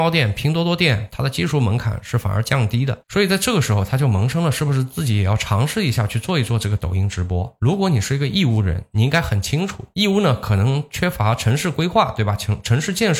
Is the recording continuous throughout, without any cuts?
no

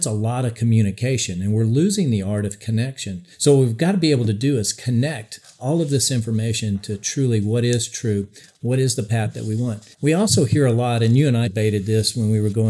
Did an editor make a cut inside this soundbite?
yes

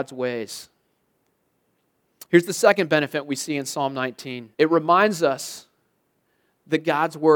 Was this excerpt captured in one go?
no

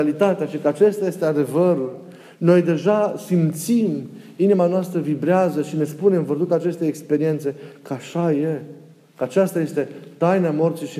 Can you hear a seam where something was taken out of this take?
no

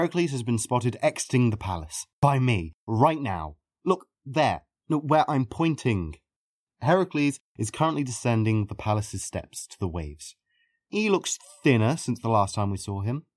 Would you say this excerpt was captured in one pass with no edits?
yes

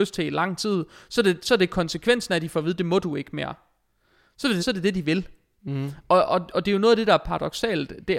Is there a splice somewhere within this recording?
yes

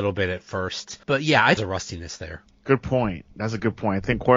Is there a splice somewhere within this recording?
yes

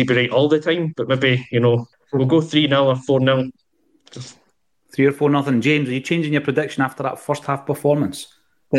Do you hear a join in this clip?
yes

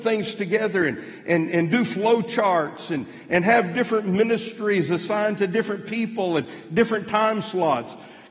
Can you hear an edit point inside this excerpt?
no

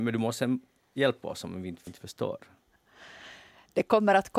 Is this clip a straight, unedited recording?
no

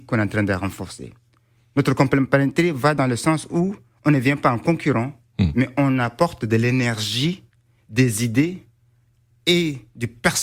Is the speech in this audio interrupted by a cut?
no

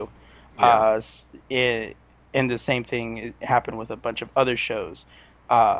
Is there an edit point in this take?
no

